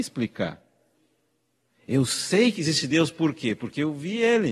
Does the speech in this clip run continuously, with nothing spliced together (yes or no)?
yes